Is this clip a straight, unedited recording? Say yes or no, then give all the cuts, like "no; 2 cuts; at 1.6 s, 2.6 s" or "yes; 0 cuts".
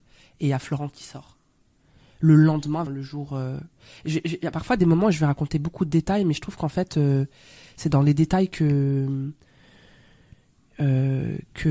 no; 1 cut; at 2.9 s